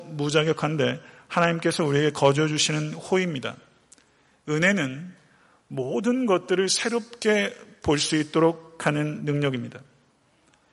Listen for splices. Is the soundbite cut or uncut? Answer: uncut